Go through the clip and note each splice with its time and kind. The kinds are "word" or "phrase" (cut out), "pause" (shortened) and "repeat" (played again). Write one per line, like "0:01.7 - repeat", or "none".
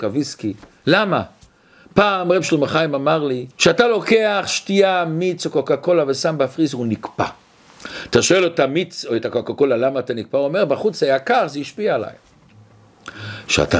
0:03.5 - pause